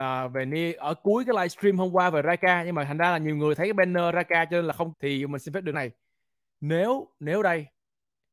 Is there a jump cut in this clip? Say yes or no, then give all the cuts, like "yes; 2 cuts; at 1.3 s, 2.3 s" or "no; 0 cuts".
yes; 2 cuts; at 4.9 s, 5.7 s